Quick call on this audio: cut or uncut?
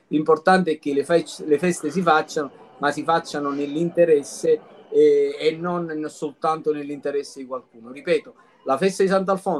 uncut